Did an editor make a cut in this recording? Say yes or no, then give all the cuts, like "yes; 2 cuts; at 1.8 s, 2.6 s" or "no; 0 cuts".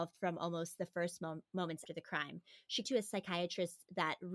yes; 2 cuts; at 1.9 s, 2.8 s